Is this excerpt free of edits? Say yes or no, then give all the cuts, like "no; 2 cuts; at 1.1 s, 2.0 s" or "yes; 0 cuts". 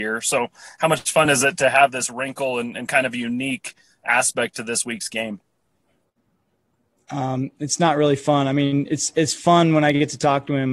yes; 0 cuts